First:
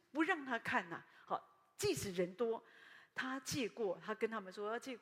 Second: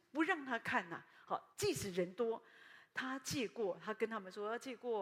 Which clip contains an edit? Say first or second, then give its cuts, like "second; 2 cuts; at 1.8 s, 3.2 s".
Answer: second; 1 cut; at 1.5 s